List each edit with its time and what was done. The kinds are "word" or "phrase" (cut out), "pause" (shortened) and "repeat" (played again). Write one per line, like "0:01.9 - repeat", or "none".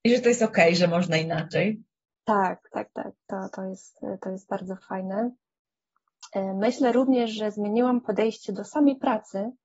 0:03.2 - pause